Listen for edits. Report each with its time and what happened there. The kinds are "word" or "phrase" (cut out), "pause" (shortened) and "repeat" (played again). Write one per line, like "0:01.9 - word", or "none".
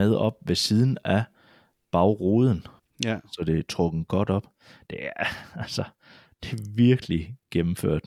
0:02.8 - pause